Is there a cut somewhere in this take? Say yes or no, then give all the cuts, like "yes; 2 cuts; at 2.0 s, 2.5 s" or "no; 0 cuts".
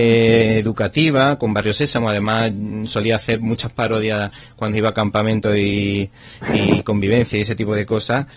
no; 0 cuts